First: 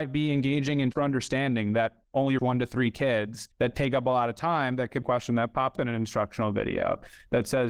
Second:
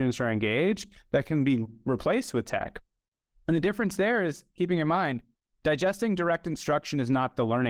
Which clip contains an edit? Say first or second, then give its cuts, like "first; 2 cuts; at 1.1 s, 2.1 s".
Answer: first; 5 cuts; at 0.9 s, 2.4 s, 3.5 s, 5.0 s, 5.8 s